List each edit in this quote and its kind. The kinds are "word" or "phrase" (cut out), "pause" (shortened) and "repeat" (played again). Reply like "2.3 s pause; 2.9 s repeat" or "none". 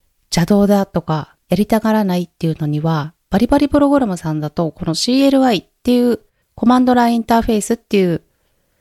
1.4 s pause; 6.4 s pause